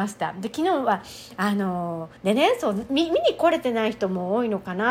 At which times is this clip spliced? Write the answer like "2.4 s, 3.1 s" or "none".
2.2 s